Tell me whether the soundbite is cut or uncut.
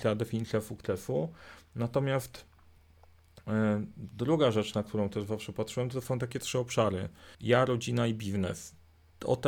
cut